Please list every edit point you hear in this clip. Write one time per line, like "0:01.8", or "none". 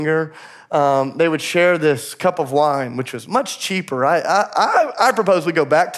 none